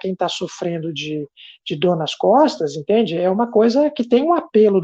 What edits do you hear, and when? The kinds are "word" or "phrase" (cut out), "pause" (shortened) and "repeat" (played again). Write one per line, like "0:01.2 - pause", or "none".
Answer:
none